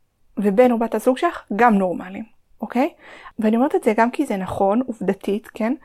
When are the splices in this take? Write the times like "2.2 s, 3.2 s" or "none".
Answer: none